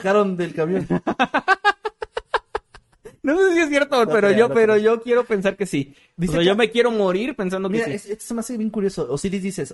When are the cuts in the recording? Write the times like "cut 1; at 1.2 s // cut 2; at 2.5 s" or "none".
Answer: cut 1; at 4.1 s